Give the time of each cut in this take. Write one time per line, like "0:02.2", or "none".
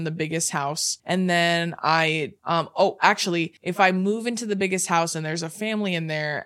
0:01.0
0:02.4
0:03.6